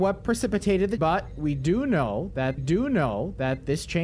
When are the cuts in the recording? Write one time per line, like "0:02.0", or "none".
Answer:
0:01.0
0:02.6

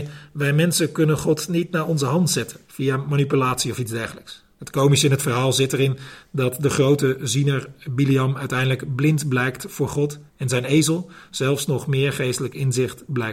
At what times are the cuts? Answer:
0:02.6
0:04.5
0:10.3

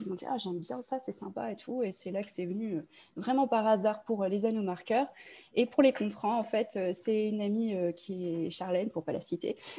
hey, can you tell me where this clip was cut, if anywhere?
none

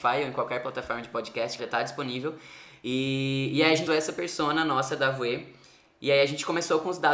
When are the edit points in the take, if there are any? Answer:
0:01.6
0:03.9

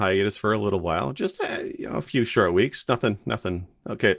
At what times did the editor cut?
none

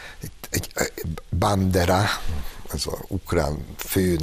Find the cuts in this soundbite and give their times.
none

